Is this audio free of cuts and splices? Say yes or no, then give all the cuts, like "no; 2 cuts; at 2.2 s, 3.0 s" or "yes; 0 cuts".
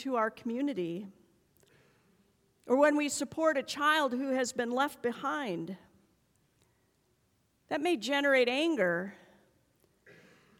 yes; 0 cuts